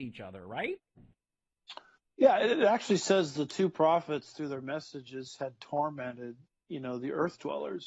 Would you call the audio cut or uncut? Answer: uncut